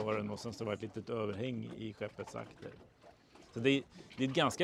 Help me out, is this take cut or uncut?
uncut